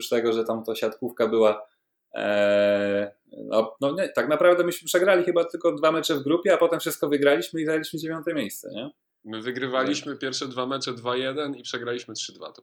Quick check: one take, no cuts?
yes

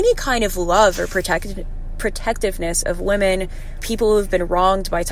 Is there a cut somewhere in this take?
yes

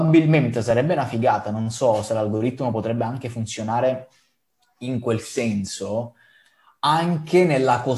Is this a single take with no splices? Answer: yes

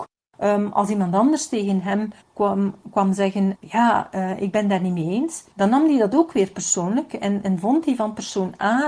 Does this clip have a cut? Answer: yes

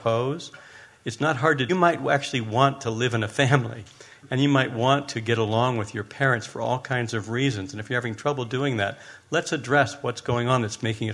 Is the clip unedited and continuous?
no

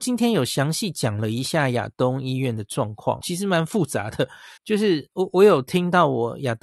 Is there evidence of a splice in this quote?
yes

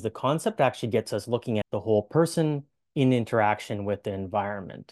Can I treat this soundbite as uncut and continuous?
no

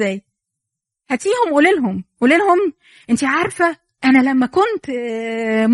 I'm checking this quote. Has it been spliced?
no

